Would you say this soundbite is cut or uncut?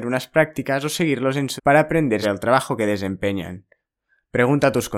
cut